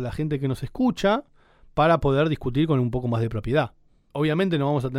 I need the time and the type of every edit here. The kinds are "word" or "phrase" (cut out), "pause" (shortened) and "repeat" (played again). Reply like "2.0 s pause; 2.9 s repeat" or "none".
none

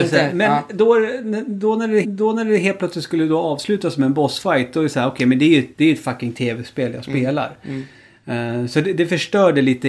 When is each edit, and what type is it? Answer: 2.0 s repeat; 5.7 s pause

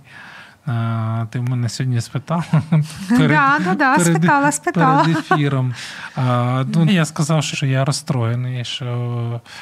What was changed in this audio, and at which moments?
6.9 s word; 7.5 s word

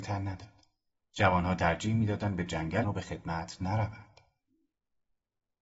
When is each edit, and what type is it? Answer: 2.8 s word

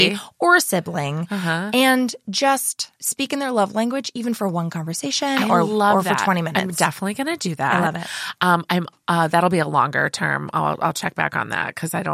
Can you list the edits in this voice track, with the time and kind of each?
3.0 s pause

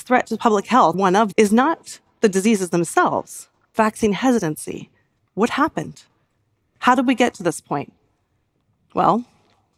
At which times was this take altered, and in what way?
0.9 s word; 1.3 s word; 3.7 s word

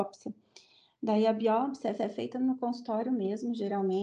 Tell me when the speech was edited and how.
2.0 s repeat

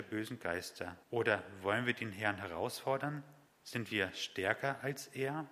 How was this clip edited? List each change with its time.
1.0 s pause; 3.4 s pause

